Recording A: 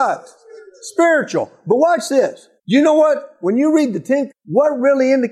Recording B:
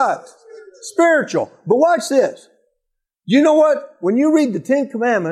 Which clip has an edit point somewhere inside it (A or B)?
A